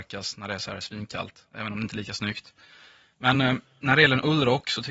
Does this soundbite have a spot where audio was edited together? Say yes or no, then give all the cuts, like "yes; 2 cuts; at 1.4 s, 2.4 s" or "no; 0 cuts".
no; 0 cuts